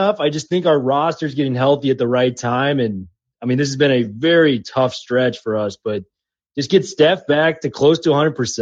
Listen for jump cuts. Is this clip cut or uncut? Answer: uncut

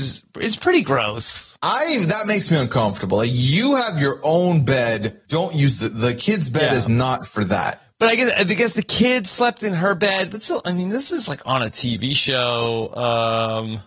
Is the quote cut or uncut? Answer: cut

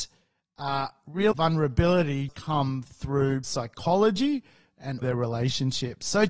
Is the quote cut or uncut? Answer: cut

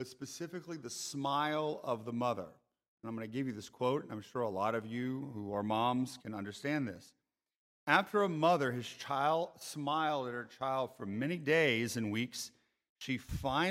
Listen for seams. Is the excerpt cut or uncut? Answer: cut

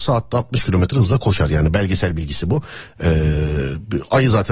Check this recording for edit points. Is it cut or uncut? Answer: uncut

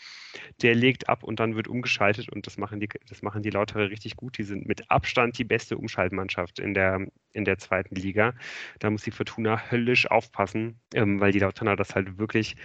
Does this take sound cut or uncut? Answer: cut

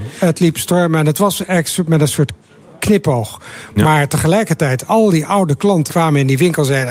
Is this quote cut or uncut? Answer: cut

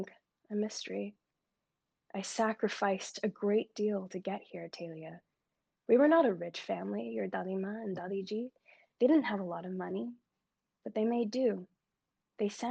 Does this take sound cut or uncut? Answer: uncut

